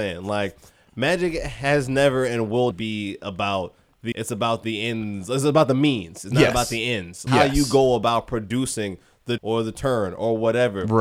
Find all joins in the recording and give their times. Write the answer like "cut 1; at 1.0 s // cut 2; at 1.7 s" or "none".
cut 1; at 2.7 s // cut 2; at 4.1 s // cut 3; at 7.3 s // cut 4; at 9.4 s